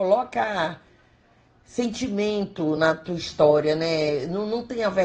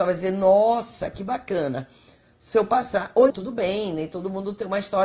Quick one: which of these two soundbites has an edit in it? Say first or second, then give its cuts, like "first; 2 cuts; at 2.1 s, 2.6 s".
second; 1 cut; at 3.3 s